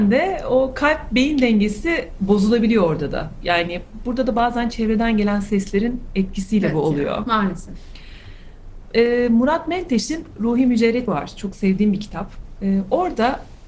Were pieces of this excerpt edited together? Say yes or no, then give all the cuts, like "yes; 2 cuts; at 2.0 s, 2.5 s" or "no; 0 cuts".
yes; 1 cut; at 11.1 s